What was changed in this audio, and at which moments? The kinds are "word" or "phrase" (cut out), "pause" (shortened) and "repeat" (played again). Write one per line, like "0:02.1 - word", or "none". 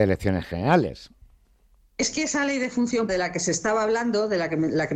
0:03.1 - word